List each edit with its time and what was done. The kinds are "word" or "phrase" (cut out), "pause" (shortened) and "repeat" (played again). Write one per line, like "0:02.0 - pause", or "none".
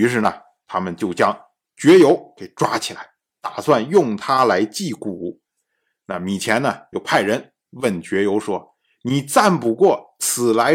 none